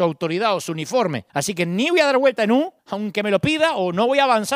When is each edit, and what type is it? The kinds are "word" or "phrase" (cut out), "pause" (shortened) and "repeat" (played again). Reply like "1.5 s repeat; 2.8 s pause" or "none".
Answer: 1.3 s pause; 2.8 s pause